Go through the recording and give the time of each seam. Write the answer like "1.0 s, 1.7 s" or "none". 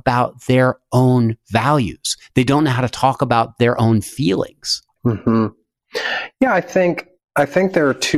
none